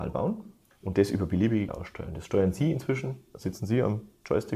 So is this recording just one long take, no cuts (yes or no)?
no